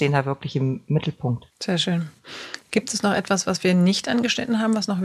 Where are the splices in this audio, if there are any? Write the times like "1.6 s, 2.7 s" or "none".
1.5 s